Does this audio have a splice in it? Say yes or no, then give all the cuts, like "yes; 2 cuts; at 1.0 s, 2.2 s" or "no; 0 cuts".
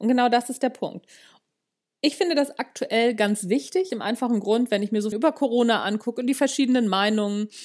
yes; 2 cuts; at 3.9 s, 5.1 s